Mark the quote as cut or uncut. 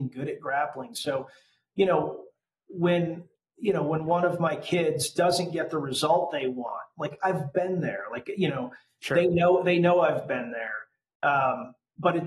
uncut